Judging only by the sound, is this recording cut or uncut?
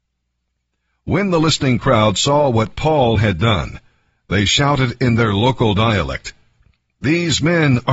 uncut